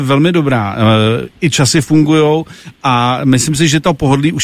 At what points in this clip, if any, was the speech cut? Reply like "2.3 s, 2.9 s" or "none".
none